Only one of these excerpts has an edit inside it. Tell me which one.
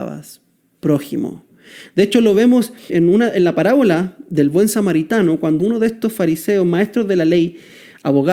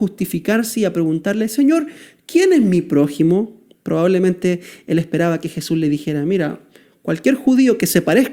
first; 2 cuts; at 2.9 s, 5.6 s

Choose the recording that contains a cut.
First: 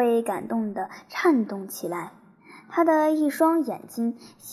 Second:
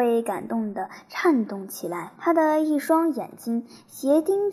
second; 1 cut; at 2.2 s

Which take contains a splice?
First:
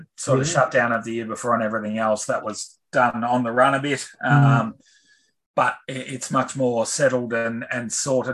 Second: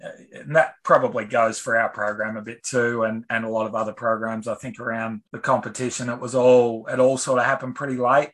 second; 1 cut; at 5.3 s

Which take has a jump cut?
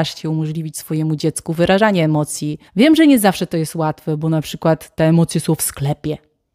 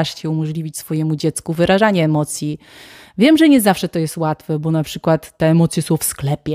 first; 1 cut; at 2.7 s

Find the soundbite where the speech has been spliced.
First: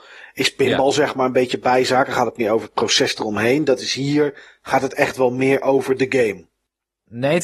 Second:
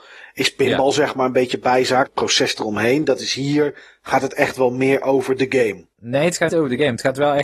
second; 3 cuts; at 2.1 s, 5.9 s, 6.5 s

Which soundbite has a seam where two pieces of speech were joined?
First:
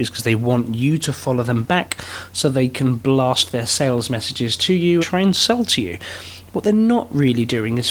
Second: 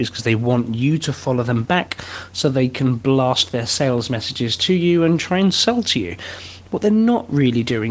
first; 1 cut; at 5.0 s

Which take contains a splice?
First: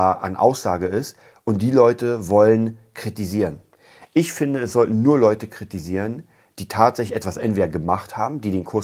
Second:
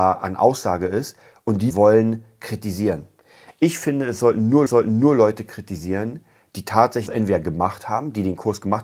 second; 3 cuts; at 1.7 s, 4.7 s, 7.1 s

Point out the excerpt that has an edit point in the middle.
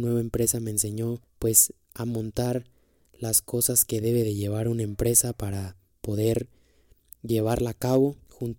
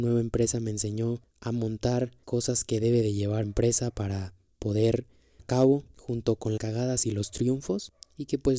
second; 5 cuts; at 1.3 s, 2.2 s, 3.4 s, 5.4 s, 6.6 s

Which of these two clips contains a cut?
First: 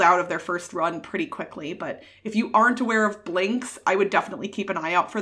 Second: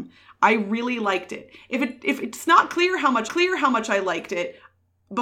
second; 1 cut; at 3.3 s

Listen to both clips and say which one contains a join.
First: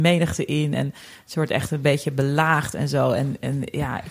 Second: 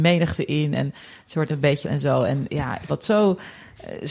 second; 4 cuts; at 1.5 s, 1.8 s, 2.5 s, 2.9 s

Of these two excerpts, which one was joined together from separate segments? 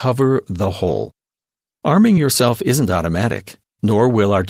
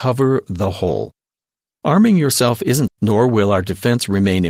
second; 1 cut; at 2.9 s

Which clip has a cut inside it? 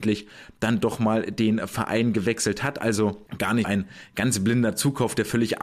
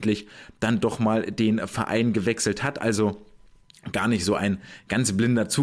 first; 2 cuts; at 3.3 s, 3.6 s

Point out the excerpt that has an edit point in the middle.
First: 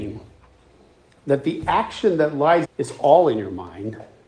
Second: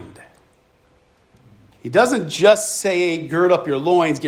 first; 1 cut; at 2.6 s

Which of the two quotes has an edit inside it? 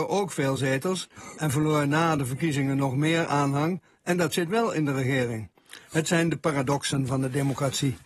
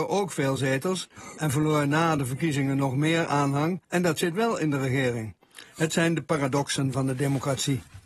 second; 1 cut; at 3.8 s

